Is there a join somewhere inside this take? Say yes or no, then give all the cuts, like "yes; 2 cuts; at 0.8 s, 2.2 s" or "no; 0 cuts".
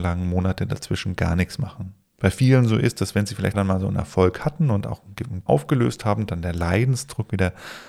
yes; 3 cuts; at 2.0 s, 3.5 s, 5.5 s